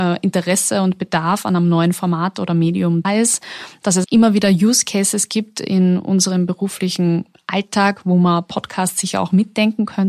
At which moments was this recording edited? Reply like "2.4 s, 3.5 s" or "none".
3.0 s, 4.0 s